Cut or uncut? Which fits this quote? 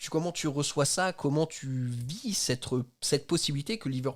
uncut